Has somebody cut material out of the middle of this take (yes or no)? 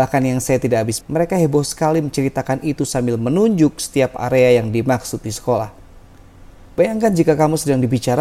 yes